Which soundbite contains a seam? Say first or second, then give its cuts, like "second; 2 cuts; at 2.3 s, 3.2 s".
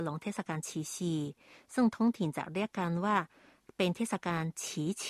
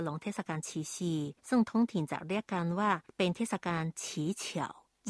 second; 2 cuts; at 1.4 s, 3.1 s